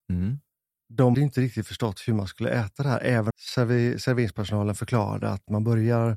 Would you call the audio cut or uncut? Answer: cut